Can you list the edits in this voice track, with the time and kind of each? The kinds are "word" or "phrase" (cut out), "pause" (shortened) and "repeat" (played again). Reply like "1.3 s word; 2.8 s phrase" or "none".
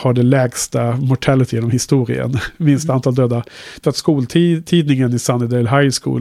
1.5 s word; 3.8 s phrase